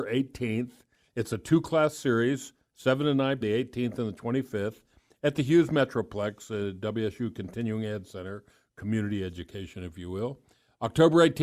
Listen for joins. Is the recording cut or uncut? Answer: cut